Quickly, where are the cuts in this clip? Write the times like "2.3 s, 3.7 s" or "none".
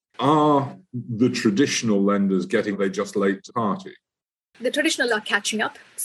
2.7 s, 3.5 s, 5.1 s